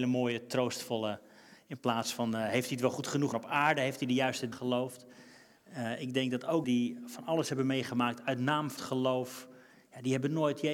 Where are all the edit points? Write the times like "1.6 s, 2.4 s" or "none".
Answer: 3.3 s, 4.5 s, 6.6 s, 8.8 s